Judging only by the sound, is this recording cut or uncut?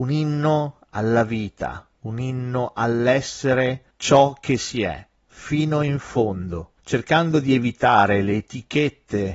cut